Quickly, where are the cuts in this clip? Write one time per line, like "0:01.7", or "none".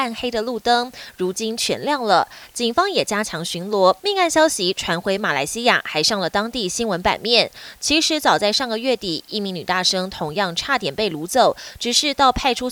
0:04.0